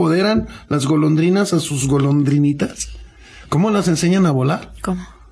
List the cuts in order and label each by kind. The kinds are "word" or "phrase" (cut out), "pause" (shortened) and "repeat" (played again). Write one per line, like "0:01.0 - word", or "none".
none

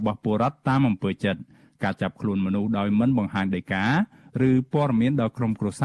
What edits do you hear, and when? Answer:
none

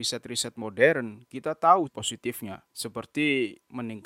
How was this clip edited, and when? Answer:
0:01.9 - word
0:02.7 - pause

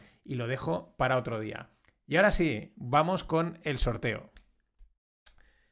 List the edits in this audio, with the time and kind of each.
none

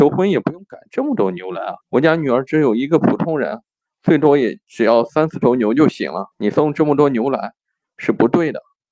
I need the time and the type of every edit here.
0:01.8 - pause
0:06.3 - pause

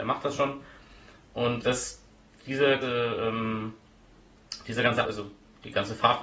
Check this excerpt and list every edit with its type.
0:01.6 - word
0:02.8 - word
0:05.0 - word

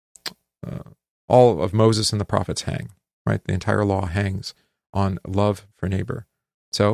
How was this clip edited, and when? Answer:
none

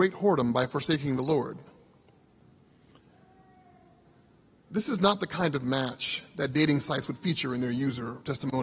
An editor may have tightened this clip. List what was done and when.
none

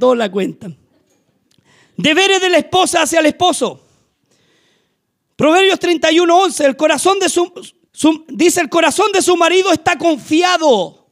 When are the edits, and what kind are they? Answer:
0:07.9 - pause

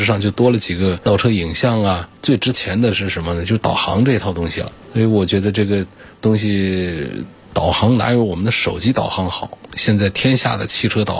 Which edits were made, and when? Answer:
0:02.2 - pause
0:06.1 - pause

